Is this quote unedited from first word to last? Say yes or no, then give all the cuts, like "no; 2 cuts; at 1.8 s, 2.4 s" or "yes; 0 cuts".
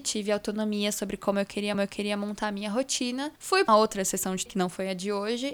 no; 4 cuts; at 1.7 s, 3.4 s, 3.7 s, 4.5 s